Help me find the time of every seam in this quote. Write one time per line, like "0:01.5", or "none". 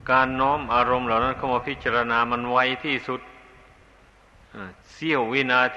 0:04.8